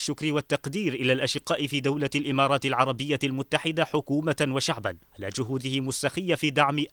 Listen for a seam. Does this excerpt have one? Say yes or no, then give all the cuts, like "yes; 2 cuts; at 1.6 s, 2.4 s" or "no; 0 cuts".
yes; 1 cut; at 5.1 s